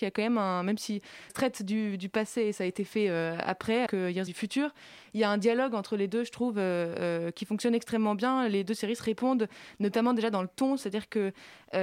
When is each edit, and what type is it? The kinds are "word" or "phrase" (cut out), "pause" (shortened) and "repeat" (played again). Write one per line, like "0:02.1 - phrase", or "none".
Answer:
0:01.3 - phrase
0:03.9 - word
0:04.3 - phrase